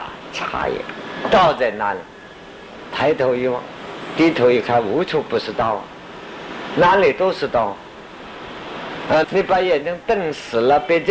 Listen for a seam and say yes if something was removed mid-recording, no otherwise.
yes